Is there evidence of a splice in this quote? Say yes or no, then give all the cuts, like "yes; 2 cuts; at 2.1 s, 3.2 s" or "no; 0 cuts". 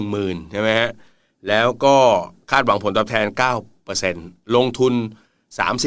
no; 0 cuts